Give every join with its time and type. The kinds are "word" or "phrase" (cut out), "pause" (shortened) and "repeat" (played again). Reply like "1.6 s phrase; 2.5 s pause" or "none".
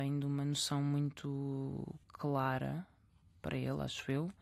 2.0 s pause